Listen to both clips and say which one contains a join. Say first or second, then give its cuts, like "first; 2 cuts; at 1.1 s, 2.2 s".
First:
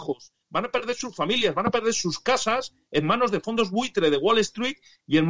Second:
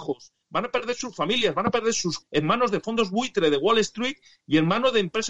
second; 1 cut; at 2.2 s